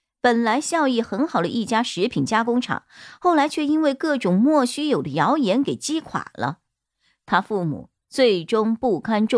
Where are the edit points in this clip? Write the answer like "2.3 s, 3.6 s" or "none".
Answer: none